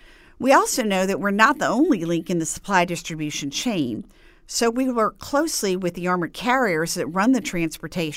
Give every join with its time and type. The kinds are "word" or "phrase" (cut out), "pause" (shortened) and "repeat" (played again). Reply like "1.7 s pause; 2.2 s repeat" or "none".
none